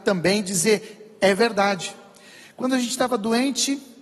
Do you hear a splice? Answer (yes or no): no